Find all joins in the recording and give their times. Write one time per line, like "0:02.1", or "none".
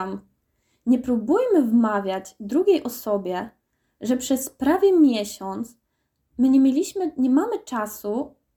none